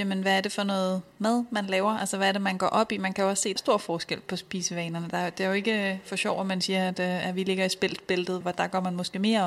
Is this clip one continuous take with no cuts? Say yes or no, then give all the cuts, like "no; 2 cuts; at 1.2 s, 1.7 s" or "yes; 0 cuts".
no; 2 cuts; at 3.6 s, 8.4 s